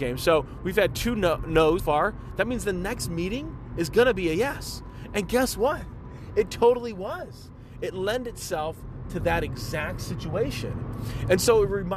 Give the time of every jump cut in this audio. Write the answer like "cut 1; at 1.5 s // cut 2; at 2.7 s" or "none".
cut 1; at 1.8 s